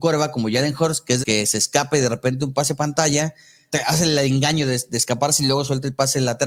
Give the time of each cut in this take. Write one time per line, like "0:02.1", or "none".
0:01.2
0:03.7